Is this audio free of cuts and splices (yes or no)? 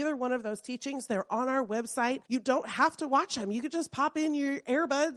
no